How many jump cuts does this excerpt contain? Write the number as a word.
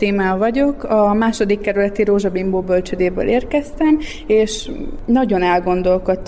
zero